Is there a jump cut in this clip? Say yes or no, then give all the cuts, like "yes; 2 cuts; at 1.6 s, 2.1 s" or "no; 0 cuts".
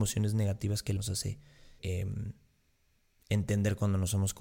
yes; 2 cuts; at 1.0 s, 1.8 s